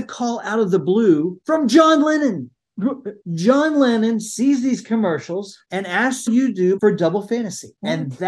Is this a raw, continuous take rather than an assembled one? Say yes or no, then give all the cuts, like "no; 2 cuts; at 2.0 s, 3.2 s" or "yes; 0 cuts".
no; 3 cuts; at 3.2 s, 6.3 s, 6.8 s